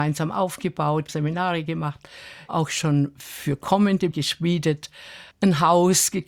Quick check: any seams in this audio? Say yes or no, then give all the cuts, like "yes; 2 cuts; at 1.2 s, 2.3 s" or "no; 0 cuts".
yes; 4 cuts; at 1.1 s, 2.5 s, 4.1 s, 5.3 s